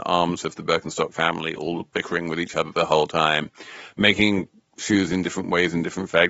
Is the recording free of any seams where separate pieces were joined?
yes; 0 cuts

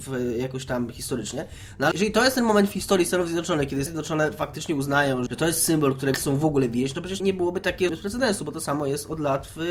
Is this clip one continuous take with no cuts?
no; 6 cuts; at 1.9 s, 3.9 s, 5.3 s, 6.1 s, 7.2 s, 7.9 s

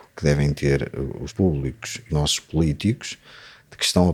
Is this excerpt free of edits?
no; 2 cuts; at 1.3 s, 2.1 s

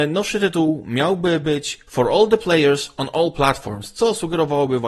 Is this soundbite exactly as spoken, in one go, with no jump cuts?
yes; 0 cuts

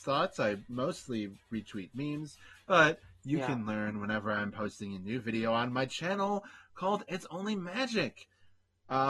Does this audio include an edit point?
no; 0 cuts

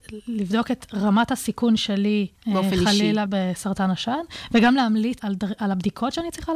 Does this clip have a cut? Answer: yes; 3 cuts; at 2.4 s, 3.3 s, 5.2 s

